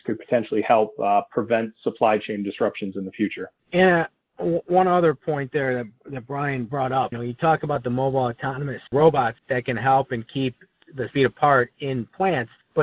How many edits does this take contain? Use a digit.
4